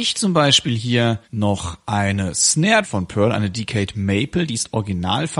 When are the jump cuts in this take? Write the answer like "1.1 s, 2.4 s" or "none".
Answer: 1.2 s, 2.8 s